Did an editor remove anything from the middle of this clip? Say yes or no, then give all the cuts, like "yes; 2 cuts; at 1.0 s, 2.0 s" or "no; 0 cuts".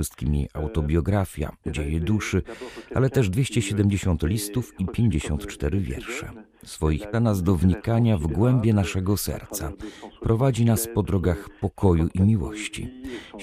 yes; 1 cut; at 7.1 s